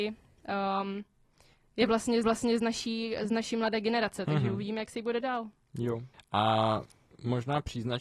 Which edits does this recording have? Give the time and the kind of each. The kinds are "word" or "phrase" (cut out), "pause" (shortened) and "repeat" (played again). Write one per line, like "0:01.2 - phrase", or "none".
0:02.2 - repeat
0:05.2 - word
0:06.1 - pause